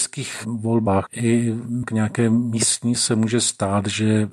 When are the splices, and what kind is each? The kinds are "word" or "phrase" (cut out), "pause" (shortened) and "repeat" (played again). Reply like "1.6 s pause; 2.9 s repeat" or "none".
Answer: 1.8 s word; 2.9 s word